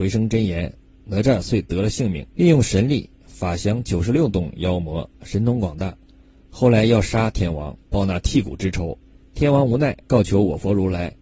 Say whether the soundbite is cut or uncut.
cut